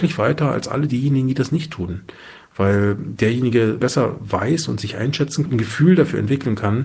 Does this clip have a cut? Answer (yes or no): yes